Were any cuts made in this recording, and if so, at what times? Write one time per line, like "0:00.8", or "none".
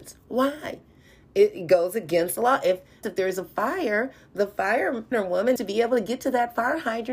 0:03.0
0:05.1
0:05.6